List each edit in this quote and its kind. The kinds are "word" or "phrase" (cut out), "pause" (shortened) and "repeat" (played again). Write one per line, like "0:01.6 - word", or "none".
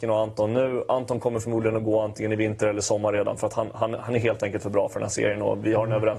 none